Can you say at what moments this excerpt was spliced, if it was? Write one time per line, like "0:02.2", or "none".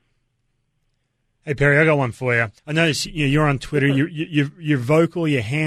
0:02.6